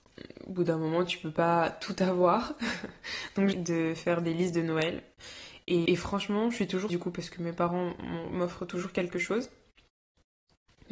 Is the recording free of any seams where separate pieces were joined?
no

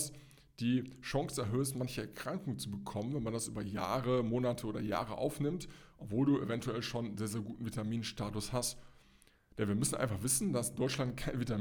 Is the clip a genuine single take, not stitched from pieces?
yes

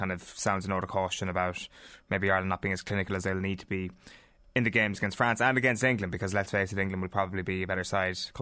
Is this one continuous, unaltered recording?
yes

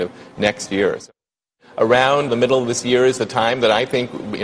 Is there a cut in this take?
yes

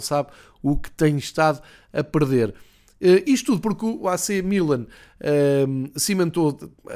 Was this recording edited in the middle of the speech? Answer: no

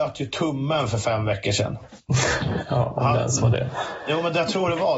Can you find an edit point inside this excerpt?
no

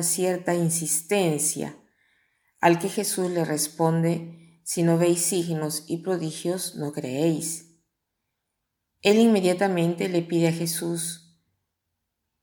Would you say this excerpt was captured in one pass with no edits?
yes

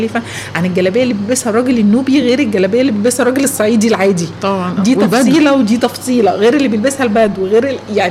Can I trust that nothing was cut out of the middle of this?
yes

